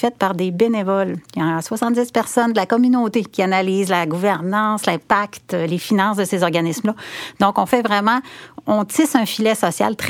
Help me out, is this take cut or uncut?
uncut